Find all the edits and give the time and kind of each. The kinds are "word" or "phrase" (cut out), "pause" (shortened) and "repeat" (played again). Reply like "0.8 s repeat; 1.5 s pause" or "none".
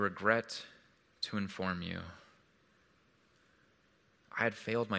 none